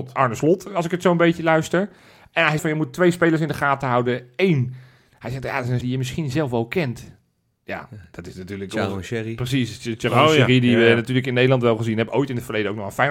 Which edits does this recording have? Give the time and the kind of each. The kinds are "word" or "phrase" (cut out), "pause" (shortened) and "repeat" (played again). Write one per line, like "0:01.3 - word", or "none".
0:02.6 - word
0:05.8 - word

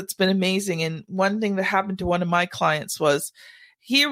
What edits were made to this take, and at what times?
none

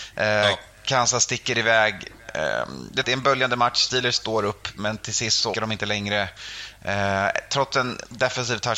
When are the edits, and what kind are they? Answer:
0:03.0 - phrase
0:04.2 - word
0:05.5 - word

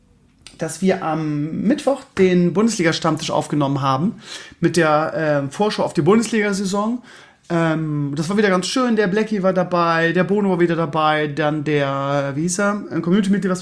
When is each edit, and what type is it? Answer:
none

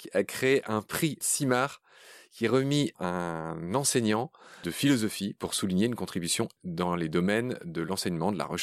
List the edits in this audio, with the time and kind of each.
0:01.2 - word
0:02.9 - word
0:04.6 - word
0:06.6 - word

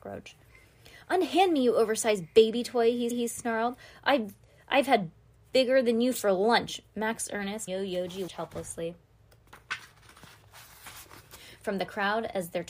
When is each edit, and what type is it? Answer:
0:03.1 - repeat
0:07.7 - word
0:08.3 - word

